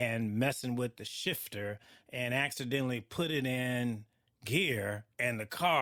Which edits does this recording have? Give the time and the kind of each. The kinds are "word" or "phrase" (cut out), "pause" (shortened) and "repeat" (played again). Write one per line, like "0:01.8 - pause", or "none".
none